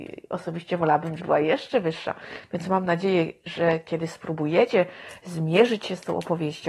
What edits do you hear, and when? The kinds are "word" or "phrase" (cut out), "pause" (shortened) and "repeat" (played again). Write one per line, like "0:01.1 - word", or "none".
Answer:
0:01.2 - word